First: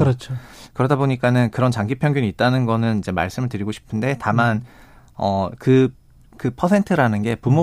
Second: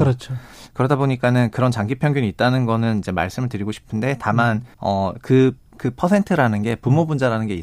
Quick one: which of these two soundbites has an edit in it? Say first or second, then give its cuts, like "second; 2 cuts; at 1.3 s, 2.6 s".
second; 2 cuts; at 4.7 s, 5.7 s